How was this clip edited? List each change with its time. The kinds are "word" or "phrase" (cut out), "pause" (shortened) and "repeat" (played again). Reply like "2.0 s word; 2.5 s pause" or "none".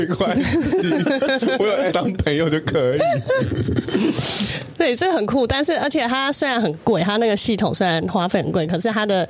1.9 s word